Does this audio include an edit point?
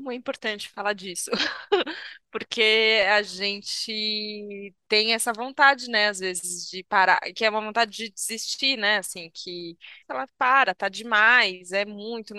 yes; 2 cuts; at 4.8 s, 10.0 s

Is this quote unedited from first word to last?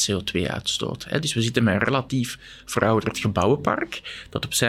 yes; 0 cuts

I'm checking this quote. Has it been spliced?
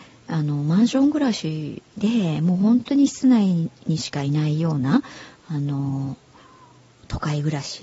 no; 0 cuts

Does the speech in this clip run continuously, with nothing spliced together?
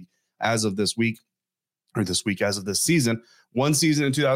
yes; 0 cuts

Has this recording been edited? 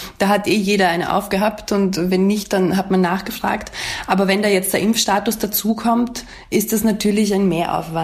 no; 0 cuts

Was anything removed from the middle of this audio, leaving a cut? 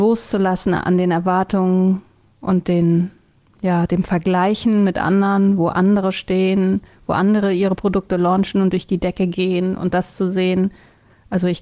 no; 0 cuts

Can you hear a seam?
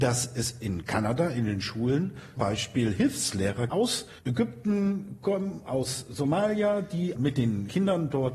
yes; 4 cuts; at 2.4 s, 3.7 s, 4.2 s, 7.2 s

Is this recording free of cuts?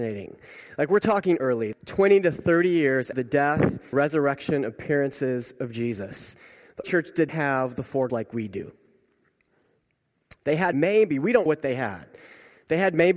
no; 9 cuts; at 1.4 s, 1.7 s, 3.1 s, 3.9 s, 6.8 s, 7.3 s, 8.1 s, 10.7 s, 11.5 s

